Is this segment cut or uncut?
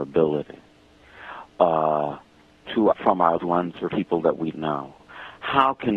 cut